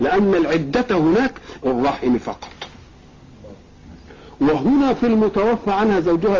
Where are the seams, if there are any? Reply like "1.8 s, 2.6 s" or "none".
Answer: 1.6 s